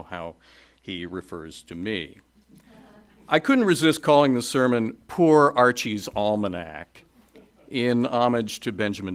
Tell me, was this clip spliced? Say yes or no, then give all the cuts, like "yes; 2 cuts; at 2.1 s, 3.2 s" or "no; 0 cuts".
no; 0 cuts